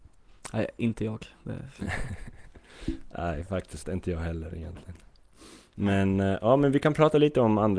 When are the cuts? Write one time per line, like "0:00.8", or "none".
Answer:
0:03.8